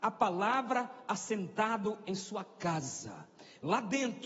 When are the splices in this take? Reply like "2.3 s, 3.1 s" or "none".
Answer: none